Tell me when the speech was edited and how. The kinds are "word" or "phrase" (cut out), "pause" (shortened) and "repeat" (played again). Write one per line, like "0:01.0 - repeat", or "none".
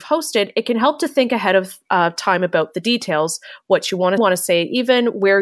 0:04.2 - phrase